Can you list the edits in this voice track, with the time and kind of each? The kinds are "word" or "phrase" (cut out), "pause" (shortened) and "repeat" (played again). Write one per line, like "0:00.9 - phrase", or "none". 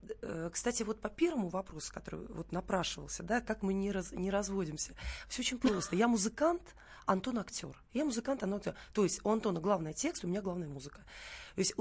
0:07.9 - pause